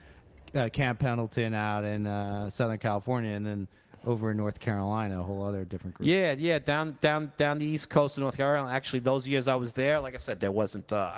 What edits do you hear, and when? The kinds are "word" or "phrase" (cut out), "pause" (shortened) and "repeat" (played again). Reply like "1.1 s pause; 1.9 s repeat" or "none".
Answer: none